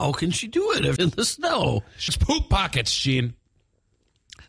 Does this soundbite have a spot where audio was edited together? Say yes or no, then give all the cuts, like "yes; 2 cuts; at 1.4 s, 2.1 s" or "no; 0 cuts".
yes; 2 cuts; at 1.0 s, 2.1 s